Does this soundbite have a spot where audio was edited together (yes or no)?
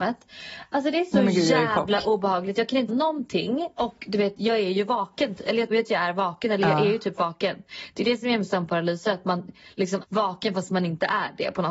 yes